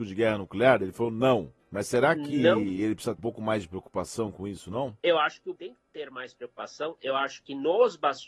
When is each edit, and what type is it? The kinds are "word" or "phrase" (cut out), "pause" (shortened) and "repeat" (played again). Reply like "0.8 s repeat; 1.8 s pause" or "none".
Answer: 1.6 s pause; 3.2 s word; 5.0 s pause; 5.6 s word